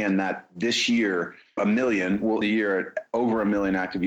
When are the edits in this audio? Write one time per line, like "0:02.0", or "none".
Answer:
0:01.6
0:02.4